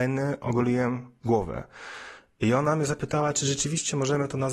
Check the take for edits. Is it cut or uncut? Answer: uncut